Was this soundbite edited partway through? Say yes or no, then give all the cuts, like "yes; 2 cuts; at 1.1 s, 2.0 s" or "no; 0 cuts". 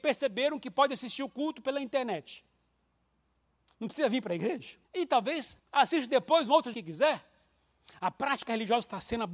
yes; 3 cuts; at 4.8 s, 5.6 s, 6.7 s